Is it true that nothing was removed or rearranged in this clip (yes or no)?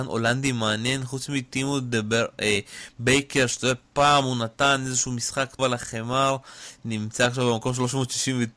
no